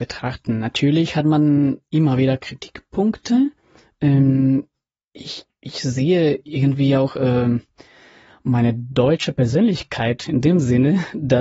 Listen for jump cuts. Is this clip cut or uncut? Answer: uncut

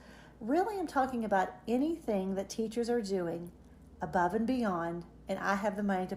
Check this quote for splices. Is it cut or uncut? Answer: uncut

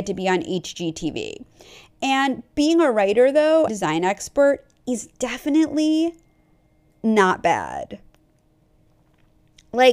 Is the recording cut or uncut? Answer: cut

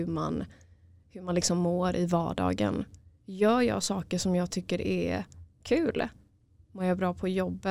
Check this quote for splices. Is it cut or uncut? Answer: uncut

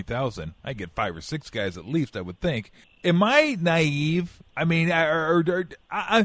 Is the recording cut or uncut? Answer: cut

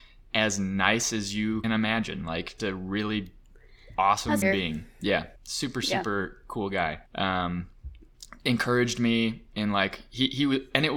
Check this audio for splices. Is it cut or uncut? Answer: cut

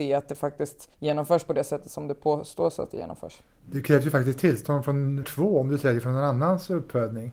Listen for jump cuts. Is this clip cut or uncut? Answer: cut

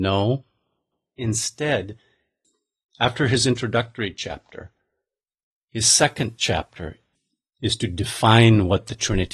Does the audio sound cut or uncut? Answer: uncut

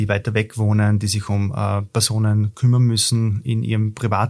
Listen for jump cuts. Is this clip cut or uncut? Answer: uncut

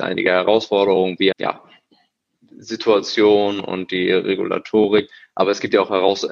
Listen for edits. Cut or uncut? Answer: cut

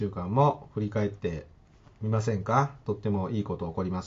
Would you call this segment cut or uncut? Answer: uncut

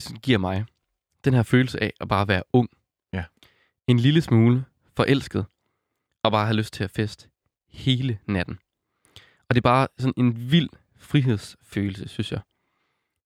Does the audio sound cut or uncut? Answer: uncut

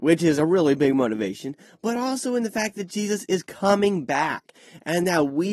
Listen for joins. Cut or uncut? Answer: uncut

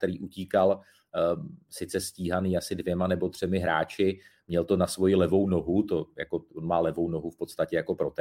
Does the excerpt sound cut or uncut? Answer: uncut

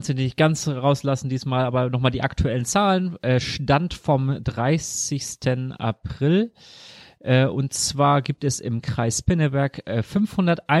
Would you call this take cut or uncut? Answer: uncut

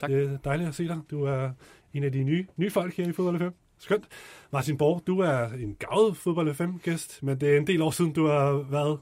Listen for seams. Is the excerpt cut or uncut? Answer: uncut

